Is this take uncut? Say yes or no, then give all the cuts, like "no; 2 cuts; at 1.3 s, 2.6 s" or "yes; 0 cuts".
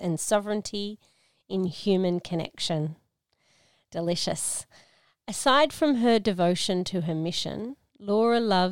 yes; 0 cuts